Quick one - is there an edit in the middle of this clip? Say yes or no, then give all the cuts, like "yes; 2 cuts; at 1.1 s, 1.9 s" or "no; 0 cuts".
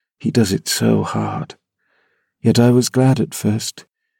no; 0 cuts